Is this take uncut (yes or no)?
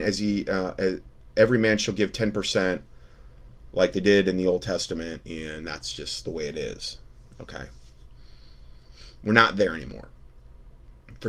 yes